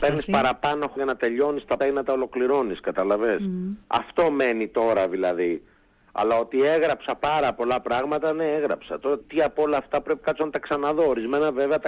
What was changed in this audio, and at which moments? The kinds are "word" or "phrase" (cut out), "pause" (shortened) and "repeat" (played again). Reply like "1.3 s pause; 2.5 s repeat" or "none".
1.0 s word; 1.8 s word; 3.8 s pause; 9.2 s word; 10.2 s word